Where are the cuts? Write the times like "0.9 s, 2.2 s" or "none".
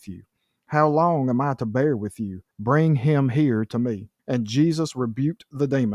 2.5 s, 4.2 s